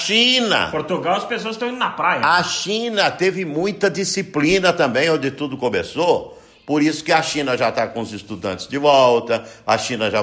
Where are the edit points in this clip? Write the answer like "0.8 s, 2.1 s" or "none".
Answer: none